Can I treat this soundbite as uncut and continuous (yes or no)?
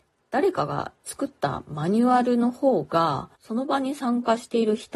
no